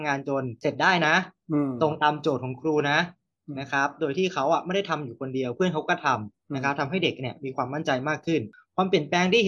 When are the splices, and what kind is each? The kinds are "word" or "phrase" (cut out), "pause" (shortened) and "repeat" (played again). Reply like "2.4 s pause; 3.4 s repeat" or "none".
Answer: none